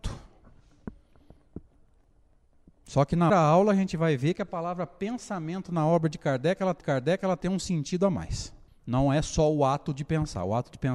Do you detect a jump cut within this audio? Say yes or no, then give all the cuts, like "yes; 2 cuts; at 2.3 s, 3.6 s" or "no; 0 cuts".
yes; 3 cuts; at 3.3 s, 6.8 s, 8.7 s